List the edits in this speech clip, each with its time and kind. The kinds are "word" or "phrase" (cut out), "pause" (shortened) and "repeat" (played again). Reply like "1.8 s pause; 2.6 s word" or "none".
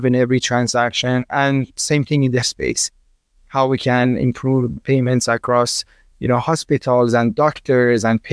2.4 s word; 4.8 s word